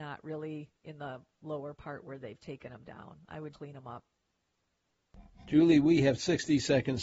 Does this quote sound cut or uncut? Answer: cut